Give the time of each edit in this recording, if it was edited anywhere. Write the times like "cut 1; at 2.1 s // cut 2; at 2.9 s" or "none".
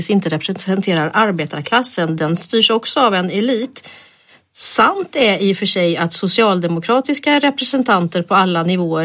none